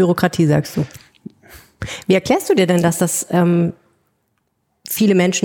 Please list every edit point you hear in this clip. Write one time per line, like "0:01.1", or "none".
none